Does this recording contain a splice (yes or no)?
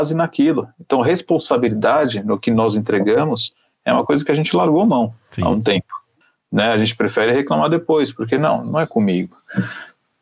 yes